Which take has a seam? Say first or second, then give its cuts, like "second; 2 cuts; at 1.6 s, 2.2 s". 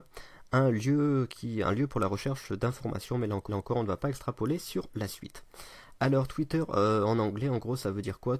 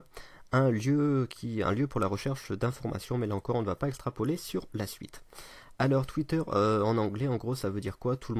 first; 1 cut; at 3.5 s